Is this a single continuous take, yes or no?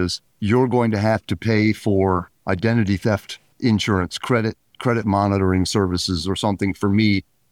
yes